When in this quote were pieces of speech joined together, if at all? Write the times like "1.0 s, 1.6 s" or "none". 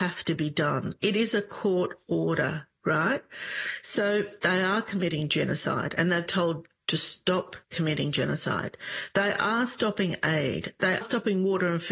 4.4 s, 6.3 s, 7.6 s, 11.0 s